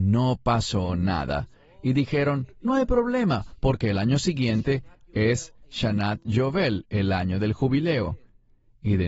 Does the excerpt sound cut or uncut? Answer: uncut